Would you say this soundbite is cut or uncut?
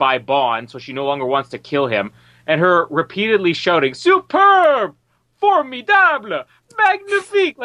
uncut